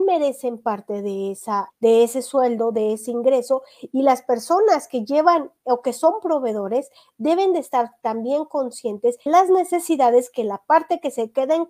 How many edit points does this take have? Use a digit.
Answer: 2